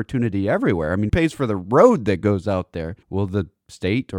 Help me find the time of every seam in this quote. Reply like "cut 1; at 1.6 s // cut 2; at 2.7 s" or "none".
cut 1; at 1.1 s // cut 2; at 3.0 s